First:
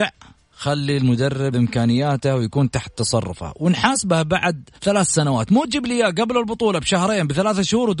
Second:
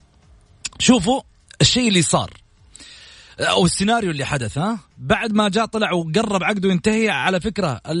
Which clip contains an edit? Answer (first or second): first